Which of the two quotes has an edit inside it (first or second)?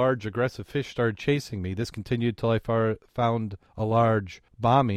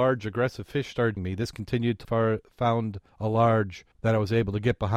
second